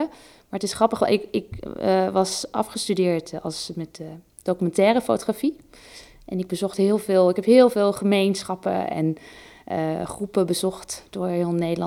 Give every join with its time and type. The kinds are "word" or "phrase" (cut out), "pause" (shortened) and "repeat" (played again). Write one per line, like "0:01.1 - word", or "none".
none